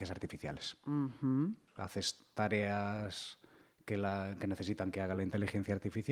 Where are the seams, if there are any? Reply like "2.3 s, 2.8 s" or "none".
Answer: none